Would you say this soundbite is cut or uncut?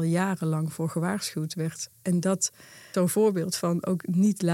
cut